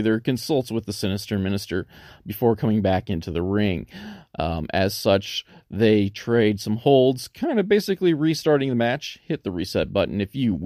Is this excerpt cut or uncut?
uncut